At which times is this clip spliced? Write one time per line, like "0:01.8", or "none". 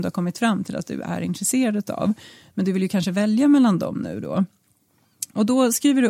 none